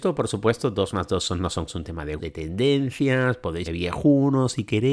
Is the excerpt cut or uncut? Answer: cut